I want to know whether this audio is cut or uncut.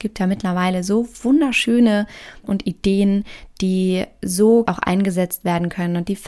cut